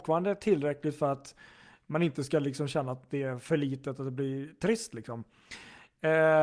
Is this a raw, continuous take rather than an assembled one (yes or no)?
yes